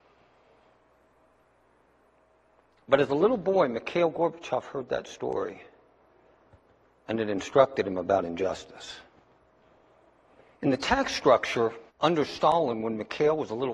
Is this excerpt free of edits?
no; 1 cut; at 11.9 s

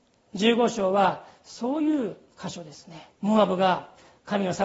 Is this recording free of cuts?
no; 1 cut; at 3.1 s

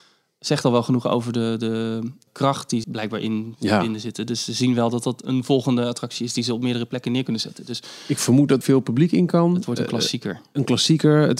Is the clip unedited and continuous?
no; 3 cuts; at 2.3 s, 2.8 s, 8.6 s

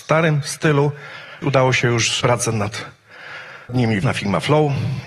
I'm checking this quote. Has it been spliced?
yes; 4 cuts; at 1.4 s, 2.2 s, 3.7 s, 4.0 s

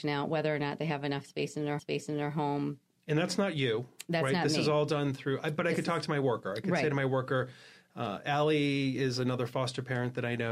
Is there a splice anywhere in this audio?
yes; 1 cut; at 1.8 s

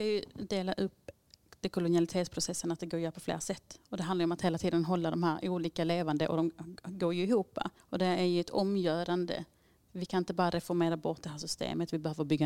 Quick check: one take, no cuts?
no; 1 cut; at 7.8 s

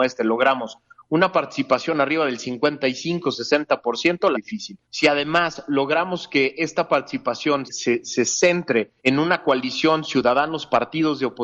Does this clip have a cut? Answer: yes; 4 cuts; at 4.3 s, 4.8 s, 7.7 s, 9.0 s

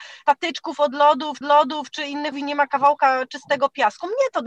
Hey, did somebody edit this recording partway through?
yes; 2 cuts; at 1.4 s, 2.3 s

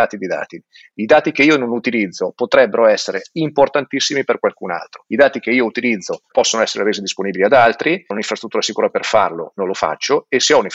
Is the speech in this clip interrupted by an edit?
yes; 2 cuts; at 6.3 s, 8.1 s

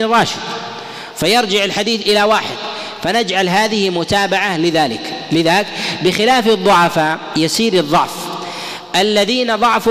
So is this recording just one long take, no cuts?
yes; 0 cuts

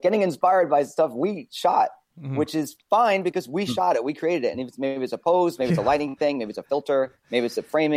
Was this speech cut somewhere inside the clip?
no; 0 cuts

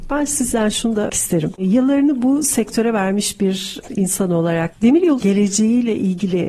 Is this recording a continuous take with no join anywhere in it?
no; 2 cuts; at 1.1 s, 5.2 s

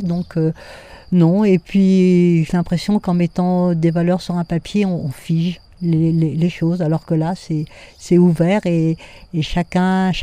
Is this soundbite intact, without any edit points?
yes; 0 cuts

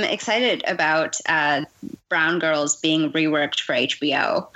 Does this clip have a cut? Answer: no; 0 cuts

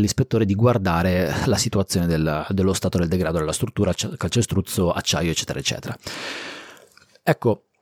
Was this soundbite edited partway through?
no; 0 cuts

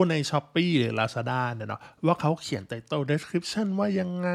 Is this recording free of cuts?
yes; 0 cuts

